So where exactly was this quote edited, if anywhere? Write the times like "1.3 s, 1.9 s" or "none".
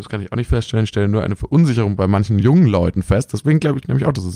none

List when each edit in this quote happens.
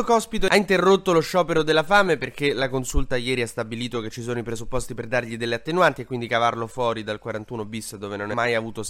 none

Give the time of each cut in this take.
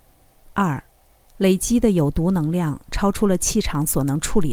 none

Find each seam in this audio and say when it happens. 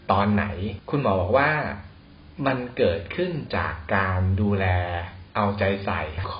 5.3 s

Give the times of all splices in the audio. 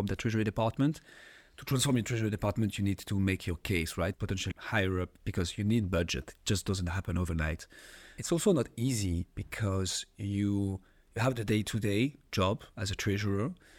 4.1 s, 4.5 s

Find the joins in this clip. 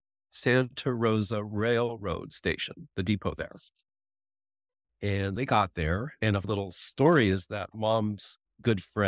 2.9 s, 5.4 s, 6.4 s

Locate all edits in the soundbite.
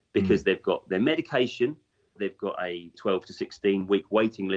2.2 s, 2.9 s

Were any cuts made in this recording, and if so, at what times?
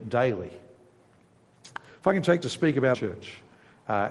2.4 s, 2.9 s

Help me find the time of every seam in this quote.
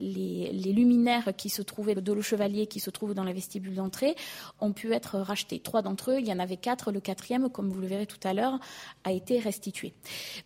1.9 s, 4.6 s

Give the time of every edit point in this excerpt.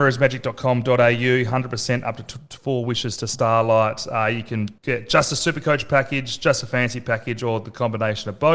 4.8 s

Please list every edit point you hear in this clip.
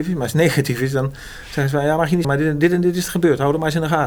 2.2 s

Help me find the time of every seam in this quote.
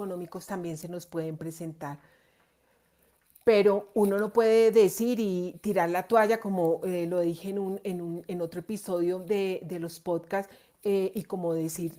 3.9 s

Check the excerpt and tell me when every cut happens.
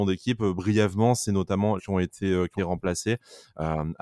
1.8 s, 2.6 s

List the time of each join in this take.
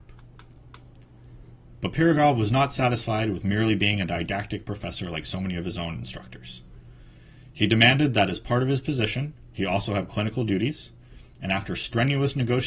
none

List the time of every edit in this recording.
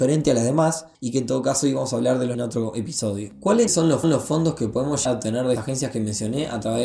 0.9 s, 2.3 s, 3.7 s, 4.0 s, 5.1 s, 5.6 s

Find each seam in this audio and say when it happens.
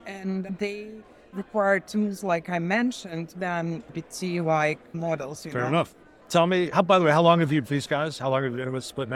3.3 s, 6.7 s, 7.6 s

